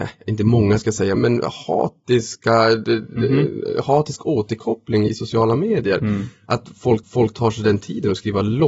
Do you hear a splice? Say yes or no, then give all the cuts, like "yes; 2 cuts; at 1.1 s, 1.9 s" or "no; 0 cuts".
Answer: yes; 3 cuts; at 1.2 s, 5.1 s, 7.0 s